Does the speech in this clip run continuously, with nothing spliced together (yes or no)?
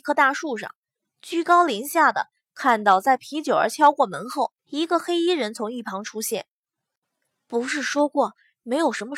no